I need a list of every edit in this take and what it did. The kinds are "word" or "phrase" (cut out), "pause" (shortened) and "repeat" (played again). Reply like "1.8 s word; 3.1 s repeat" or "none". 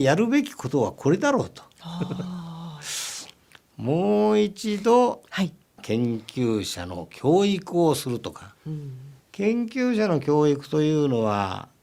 9.2 s pause